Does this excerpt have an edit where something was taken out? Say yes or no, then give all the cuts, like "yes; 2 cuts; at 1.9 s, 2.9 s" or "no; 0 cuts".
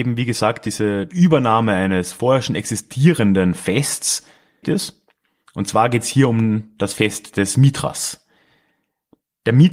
yes; 1 cut; at 4.6 s